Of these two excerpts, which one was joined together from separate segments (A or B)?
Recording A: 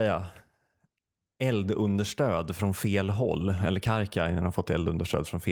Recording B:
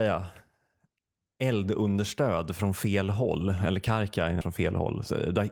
B